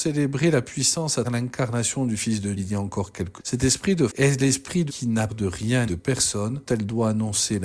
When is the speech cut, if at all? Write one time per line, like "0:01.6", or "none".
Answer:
0:01.2
0:02.6
0:03.4
0:04.1
0:04.9
0:05.3
0:05.9
0:06.7